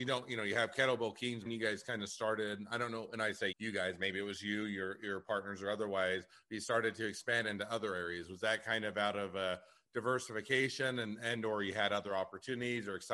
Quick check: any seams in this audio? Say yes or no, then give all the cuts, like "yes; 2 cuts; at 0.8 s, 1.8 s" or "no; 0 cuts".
yes; 2 cuts; at 1.5 s, 3.5 s